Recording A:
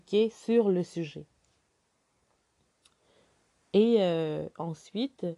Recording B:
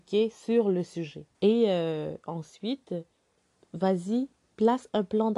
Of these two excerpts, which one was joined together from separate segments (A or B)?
B